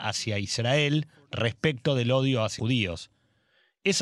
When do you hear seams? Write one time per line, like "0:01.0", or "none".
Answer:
0:02.6